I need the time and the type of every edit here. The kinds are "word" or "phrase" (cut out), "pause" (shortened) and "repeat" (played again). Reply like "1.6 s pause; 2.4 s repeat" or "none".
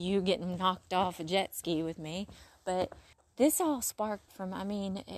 3.1 s pause; 4.3 s word